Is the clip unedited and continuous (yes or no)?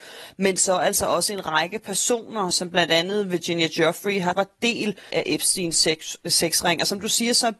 no